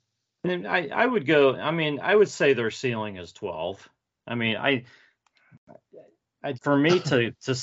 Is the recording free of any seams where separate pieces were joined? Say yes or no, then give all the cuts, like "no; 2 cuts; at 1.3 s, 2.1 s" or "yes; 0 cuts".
no; 1 cut; at 6.5 s